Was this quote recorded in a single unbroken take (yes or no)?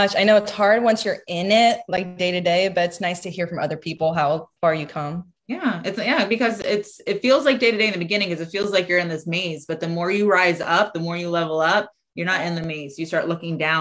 no